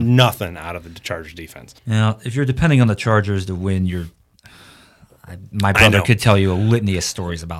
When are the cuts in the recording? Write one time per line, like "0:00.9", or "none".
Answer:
0:01.8